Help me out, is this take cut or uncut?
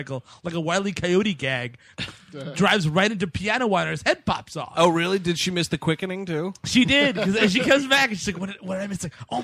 uncut